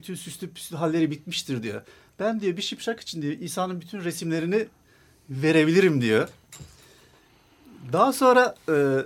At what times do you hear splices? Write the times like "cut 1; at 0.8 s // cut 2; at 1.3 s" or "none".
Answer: none